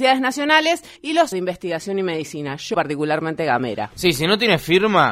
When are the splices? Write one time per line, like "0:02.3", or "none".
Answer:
0:01.0
0:01.3
0:02.7

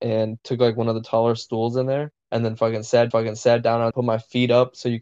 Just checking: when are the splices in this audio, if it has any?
0:02.2
0:03.1
0:03.9

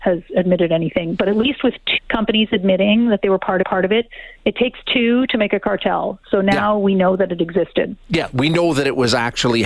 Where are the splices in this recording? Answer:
0:02.0
0:03.6

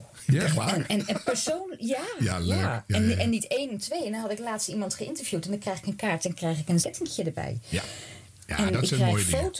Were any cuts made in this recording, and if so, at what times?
0:06.8

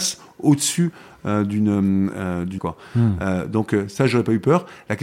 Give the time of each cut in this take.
0:02.6

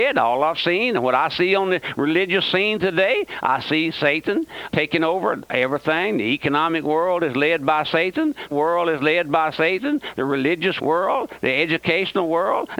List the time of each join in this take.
0:04.7
0:08.5
0:10.8

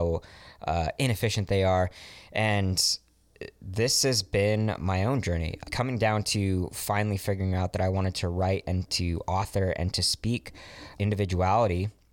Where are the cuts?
0:05.6
0:11.0

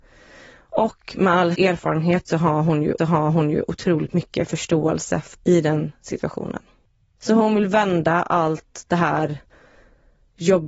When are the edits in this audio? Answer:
0:01.5
0:03.0
0:05.3
0:06.8

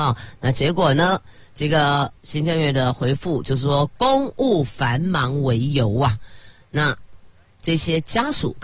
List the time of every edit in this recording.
0:02.2

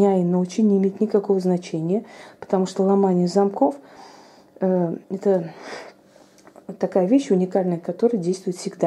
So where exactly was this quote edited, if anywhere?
0:05.0

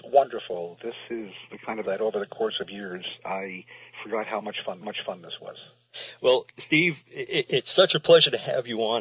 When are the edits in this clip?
0:01.8
0:04.8
0:06.5

